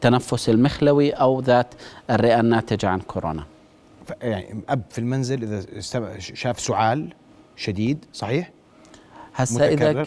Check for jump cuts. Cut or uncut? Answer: cut